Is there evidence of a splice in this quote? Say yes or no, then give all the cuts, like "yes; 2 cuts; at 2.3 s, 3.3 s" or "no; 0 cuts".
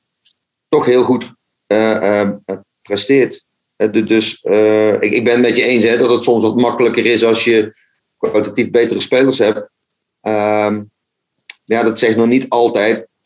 no; 0 cuts